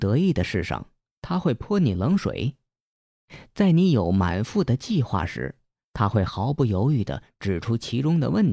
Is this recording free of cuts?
yes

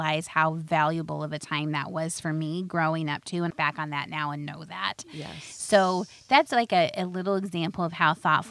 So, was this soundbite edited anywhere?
yes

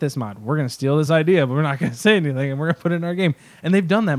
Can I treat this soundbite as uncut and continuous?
yes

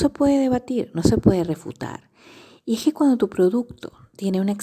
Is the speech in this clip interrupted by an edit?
no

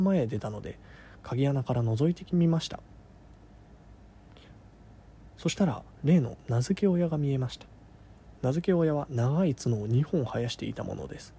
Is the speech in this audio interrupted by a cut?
yes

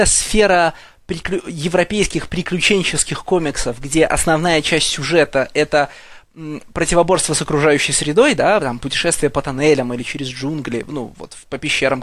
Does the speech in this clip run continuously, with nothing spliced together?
yes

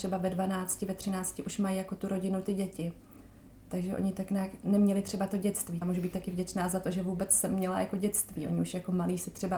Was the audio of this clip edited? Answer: yes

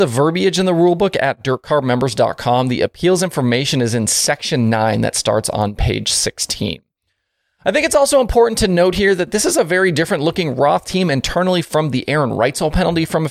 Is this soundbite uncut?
yes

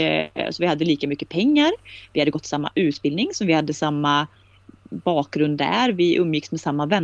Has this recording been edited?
no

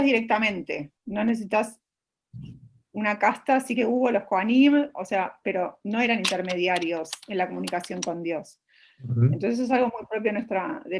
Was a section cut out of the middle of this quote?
no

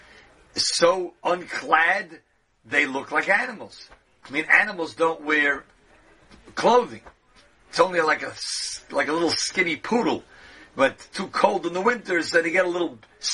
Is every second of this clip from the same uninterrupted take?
yes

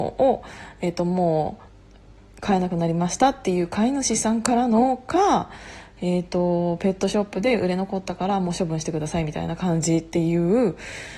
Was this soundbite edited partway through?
no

